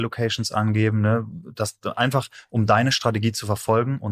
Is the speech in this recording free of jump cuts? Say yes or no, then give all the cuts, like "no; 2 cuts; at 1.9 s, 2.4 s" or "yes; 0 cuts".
yes; 0 cuts